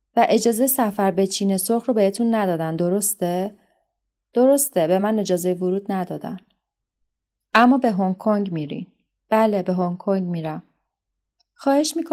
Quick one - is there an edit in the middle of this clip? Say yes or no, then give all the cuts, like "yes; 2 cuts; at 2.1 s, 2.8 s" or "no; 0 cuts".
no; 0 cuts